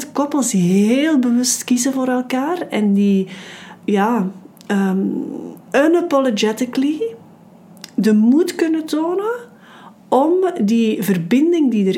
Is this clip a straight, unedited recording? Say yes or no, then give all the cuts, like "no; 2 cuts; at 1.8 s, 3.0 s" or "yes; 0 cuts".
no; 2 cuts; at 3.8 s, 5.6 s